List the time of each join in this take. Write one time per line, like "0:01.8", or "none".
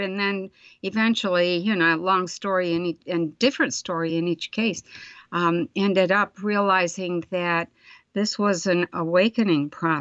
none